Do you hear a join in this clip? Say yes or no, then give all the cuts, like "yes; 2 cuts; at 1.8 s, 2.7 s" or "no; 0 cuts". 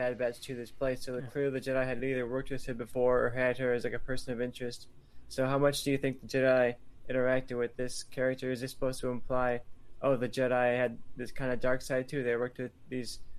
no; 0 cuts